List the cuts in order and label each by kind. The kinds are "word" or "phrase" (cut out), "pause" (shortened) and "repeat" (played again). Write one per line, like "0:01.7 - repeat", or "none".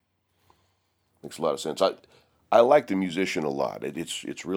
none